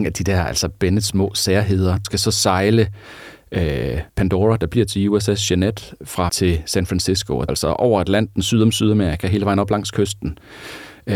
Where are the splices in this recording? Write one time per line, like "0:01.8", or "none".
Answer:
0:02.0
0:04.1
0:06.3
0:07.5